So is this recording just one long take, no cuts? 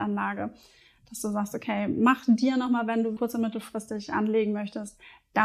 no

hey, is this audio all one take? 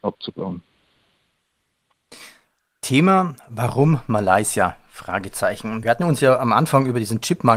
yes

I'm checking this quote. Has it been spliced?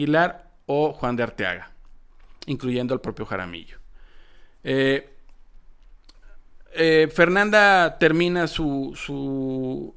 no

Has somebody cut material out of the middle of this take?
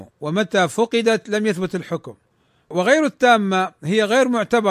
yes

